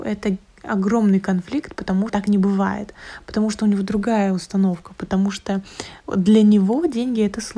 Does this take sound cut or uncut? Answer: cut